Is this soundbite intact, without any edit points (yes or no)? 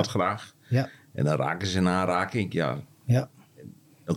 yes